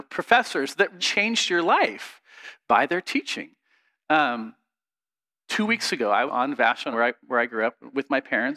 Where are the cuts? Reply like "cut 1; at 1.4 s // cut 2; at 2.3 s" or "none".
cut 1; at 1.0 s // cut 2; at 6.3 s // cut 3; at 6.9 s

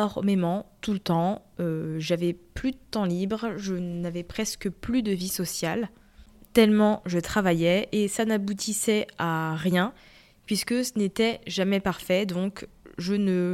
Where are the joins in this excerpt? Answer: none

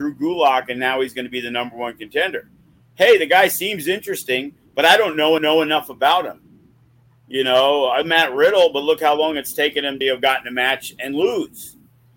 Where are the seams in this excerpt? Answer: cut 1; at 5.4 s // cut 2; at 8.0 s // cut 3; at 10.0 s

